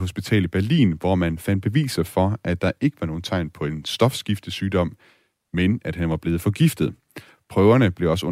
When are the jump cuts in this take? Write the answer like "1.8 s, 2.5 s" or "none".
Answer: none